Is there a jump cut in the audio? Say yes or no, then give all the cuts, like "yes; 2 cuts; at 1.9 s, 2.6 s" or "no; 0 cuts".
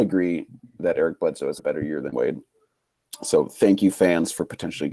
yes; 2 cuts; at 1.6 s, 2.1 s